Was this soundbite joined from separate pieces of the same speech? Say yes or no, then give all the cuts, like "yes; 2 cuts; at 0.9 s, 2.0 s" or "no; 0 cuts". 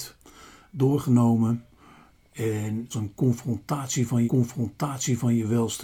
yes; 2 cuts; at 2.9 s, 4.3 s